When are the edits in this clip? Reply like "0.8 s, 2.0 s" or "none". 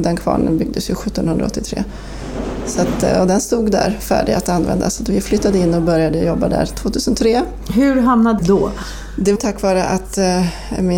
8.4 s, 9.4 s